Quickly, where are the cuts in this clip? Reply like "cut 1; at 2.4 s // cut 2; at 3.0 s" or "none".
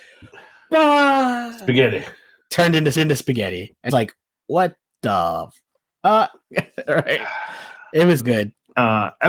cut 1; at 3.0 s // cut 2; at 3.9 s // cut 3; at 8.2 s